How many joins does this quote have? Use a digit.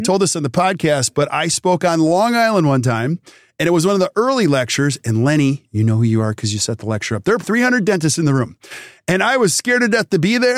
1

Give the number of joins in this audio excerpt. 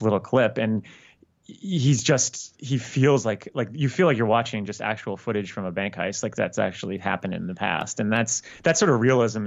0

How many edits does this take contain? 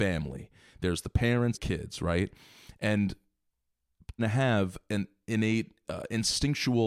3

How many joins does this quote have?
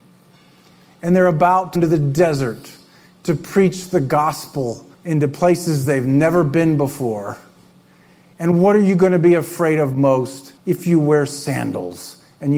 3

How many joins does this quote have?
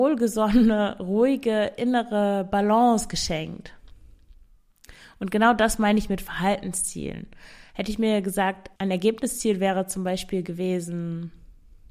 1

